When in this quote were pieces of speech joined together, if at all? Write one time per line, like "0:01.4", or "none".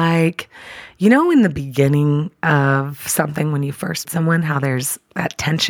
0:04.0